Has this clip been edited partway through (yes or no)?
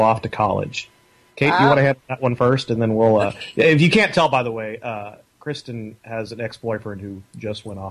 no